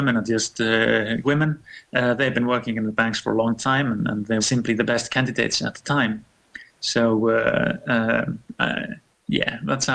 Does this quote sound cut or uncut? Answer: cut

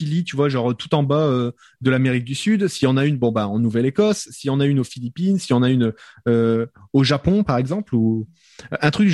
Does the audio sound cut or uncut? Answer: uncut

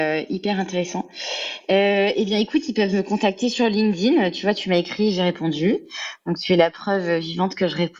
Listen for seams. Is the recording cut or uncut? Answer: uncut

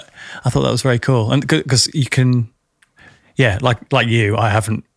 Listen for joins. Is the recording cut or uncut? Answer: uncut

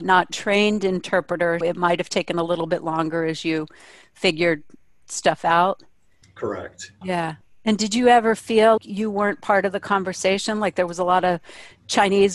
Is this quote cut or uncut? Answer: cut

